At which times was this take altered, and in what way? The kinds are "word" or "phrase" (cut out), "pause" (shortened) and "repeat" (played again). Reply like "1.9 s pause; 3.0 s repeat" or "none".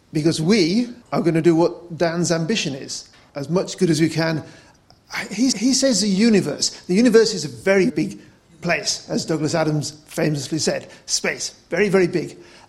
1.0 s pause; 3.3 s word; 5.5 s repeat; 7.9 s word